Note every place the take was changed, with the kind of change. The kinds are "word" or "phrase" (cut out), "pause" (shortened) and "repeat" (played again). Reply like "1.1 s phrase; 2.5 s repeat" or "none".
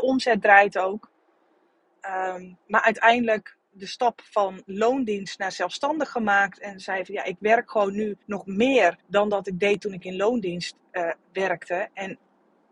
2.6 s pause; 8.2 s pause; 9.0 s pause; 11.2 s pause